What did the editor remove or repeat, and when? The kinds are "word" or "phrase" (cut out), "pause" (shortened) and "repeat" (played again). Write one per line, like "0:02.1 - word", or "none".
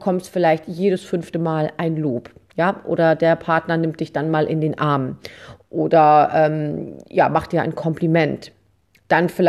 none

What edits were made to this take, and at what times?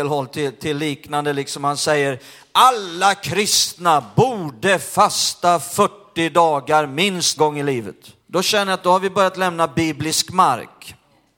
0:07.4 - word
0:08.2 - pause

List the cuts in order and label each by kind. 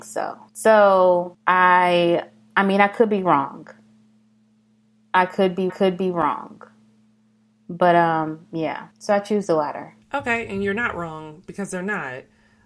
0:05.7 - repeat
0:08.9 - pause
0:10.0 - pause

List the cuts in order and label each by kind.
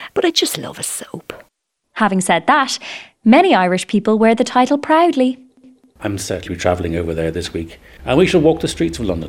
0:06.5 - word

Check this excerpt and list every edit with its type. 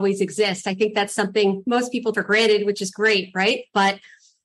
0:02.1 - word

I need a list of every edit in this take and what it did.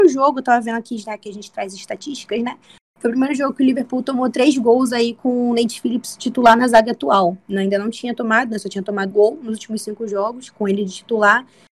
0:09.1 - word

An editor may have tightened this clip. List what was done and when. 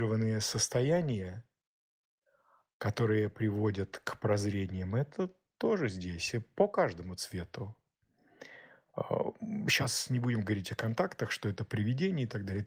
none

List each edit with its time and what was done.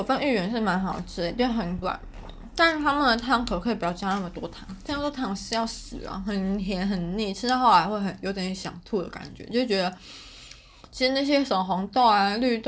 0:01.8 - word

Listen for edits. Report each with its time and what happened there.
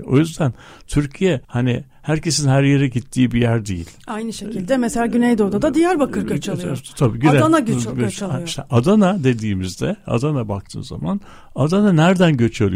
0:01.4 - pause

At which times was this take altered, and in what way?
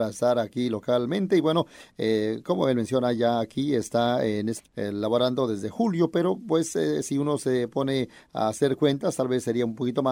0:04.6 - word

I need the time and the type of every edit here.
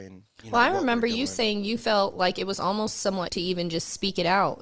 0:03.3 - phrase

